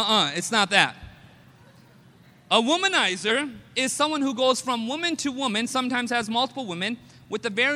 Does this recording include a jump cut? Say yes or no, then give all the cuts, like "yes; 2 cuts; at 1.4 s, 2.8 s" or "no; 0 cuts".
no; 0 cuts